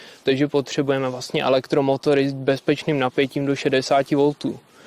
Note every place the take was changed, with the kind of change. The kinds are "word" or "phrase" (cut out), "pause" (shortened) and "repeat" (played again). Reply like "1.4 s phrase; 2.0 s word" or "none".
none